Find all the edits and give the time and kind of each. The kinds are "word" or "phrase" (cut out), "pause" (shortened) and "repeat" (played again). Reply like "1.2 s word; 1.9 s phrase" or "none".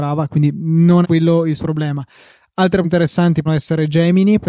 1.0 s word; 1.6 s word; 2.8 s word; 3.5 s word